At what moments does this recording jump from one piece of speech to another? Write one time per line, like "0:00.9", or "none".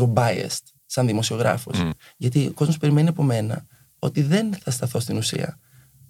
none